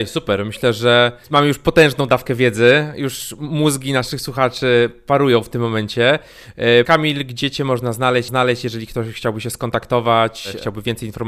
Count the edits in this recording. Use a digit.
3